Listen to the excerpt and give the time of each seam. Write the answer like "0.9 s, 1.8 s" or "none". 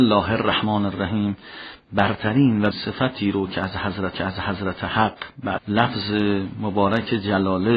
2.7 s, 4.1 s, 5.6 s